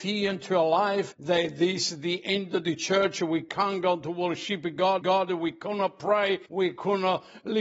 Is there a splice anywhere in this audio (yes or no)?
yes